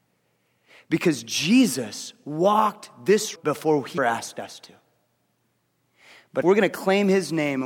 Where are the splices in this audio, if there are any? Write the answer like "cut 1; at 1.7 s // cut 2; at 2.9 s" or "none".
cut 1; at 3.4 s // cut 2; at 4.0 s // cut 3; at 6.4 s